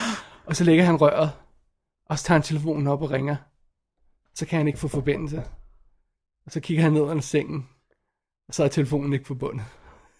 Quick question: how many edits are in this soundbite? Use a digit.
0